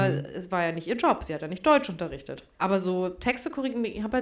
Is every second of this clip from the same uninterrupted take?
no; 1 cut; at 2.5 s

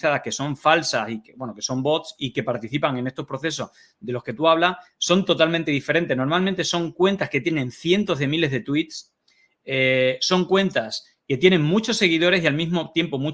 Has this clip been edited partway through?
no; 0 cuts

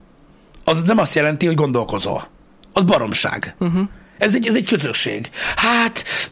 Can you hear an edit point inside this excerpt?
no; 0 cuts

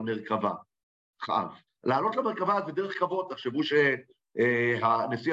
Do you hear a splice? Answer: yes; 1 cut; at 1.7 s

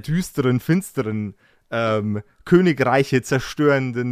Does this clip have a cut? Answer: no; 0 cuts

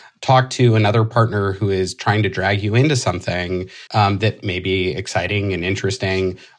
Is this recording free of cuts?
no; 1 cut; at 3.9 s

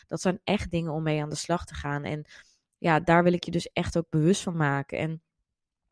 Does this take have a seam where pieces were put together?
no; 0 cuts

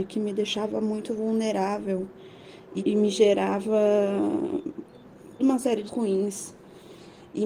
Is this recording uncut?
no; 3 cuts; at 2.8 s, 5.4 s, 5.9 s

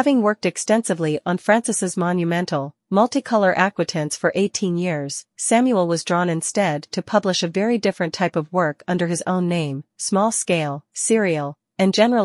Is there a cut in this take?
no; 0 cuts

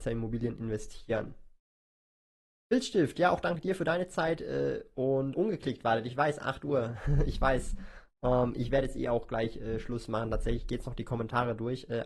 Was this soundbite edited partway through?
yes; 1 cut; at 5.3 s

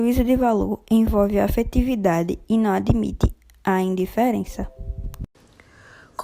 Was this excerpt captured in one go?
yes; 0 cuts

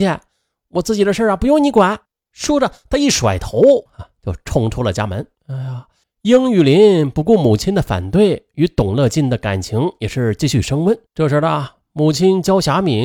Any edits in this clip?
yes; 5 cuts; at 2.0 s, 3.9 s, 5.3 s, 6.0 s, 11.1 s

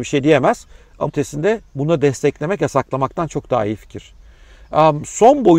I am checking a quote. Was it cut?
yes; 1 cut; at 1.1 s

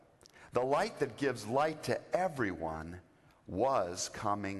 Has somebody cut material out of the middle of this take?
no; 0 cuts

